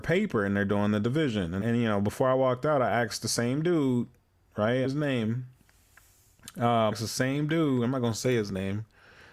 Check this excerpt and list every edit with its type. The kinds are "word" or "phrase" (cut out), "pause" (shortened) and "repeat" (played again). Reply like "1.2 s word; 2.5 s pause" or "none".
1.6 s word; 4.8 s word; 6.9 s word

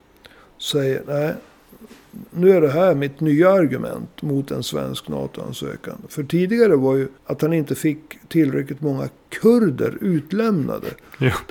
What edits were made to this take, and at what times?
7.2 s pause

